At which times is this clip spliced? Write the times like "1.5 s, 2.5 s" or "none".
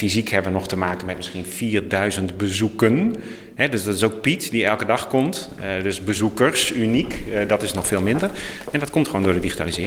none